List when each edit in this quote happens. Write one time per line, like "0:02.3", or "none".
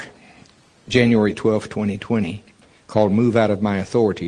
none